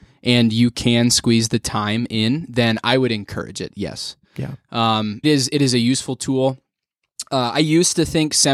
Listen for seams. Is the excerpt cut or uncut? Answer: cut